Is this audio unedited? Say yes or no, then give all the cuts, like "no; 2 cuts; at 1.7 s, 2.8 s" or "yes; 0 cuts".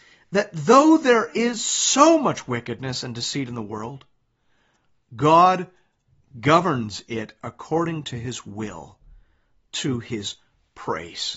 yes; 0 cuts